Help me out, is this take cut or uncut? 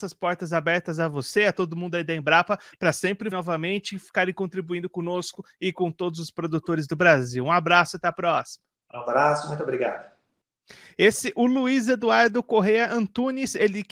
cut